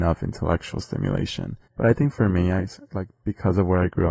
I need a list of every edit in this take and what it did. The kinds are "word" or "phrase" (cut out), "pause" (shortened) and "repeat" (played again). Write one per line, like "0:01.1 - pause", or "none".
0:01.6 - pause